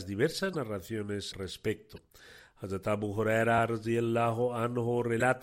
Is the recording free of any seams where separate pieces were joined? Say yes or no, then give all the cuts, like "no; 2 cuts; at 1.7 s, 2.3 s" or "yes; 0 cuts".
no; 1 cut; at 1.3 s